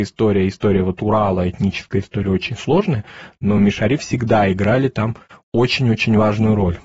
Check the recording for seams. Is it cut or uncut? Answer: uncut